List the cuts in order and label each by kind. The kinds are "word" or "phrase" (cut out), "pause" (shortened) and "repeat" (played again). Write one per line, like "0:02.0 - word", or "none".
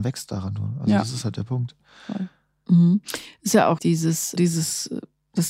0:03.8 - word
0:04.4 - word

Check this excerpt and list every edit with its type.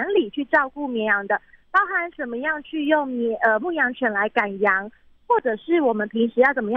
none

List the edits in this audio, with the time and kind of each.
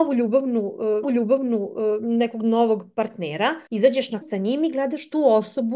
0:01.0 - repeat
0:03.7 - pause
0:04.2 - word

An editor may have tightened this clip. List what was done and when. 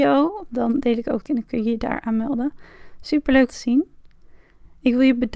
0:01.3 - word
0:03.5 - phrase

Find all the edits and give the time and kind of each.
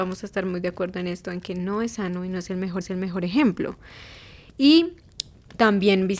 0:02.8 - repeat

